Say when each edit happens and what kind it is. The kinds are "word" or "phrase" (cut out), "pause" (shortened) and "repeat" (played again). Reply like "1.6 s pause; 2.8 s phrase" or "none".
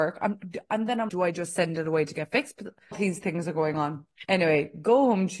1.1 s word; 2.9 s word